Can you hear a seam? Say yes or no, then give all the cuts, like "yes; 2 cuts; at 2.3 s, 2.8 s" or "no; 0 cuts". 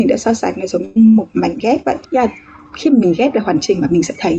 yes; 1 cut; at 2.0 s